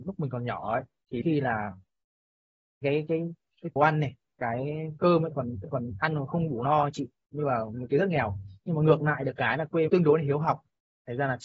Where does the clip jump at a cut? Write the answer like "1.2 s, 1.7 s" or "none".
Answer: 1.2 s, 2.8 s, 3.8 s, 5.6 s, 9.9 s